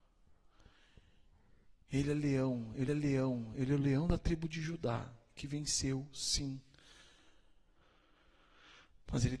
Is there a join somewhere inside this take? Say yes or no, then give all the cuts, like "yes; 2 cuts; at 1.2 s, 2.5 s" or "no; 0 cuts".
yes; 1 cut; at 2.9 s